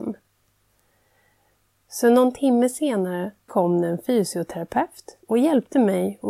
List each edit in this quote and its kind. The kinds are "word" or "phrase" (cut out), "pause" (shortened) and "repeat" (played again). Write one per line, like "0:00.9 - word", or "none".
0:03.5 - word
0:05.2 - pause

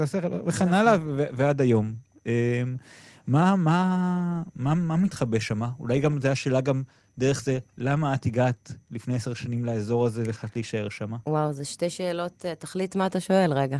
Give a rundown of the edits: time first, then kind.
none

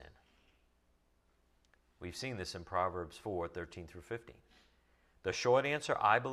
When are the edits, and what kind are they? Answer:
none

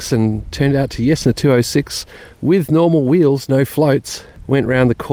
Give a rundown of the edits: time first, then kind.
0:01.2 - phrase

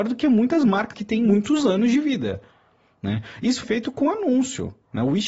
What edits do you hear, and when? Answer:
0:00.9 - word
0:03.6 - word

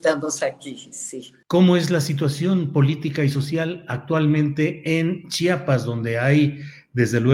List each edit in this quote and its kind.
0:01.4 - pause

